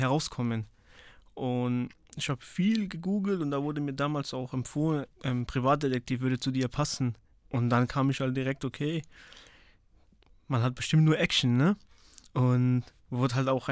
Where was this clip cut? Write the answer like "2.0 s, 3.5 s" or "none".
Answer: 2.0 s, 5.1 s, 7.3 s